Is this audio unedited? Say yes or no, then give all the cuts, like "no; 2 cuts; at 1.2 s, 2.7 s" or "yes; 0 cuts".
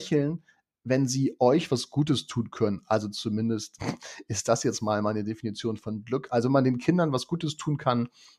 yes; 0 cuts